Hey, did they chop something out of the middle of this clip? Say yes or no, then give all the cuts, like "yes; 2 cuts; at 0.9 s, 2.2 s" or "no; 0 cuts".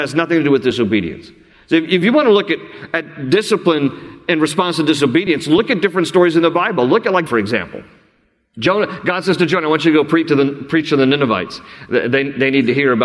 yes; 1 cut; at 7.3 s